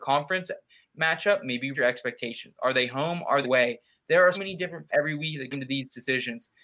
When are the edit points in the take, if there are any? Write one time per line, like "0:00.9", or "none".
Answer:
0:01.7
0:03.4
0:04.3
0:04.9
0:05.5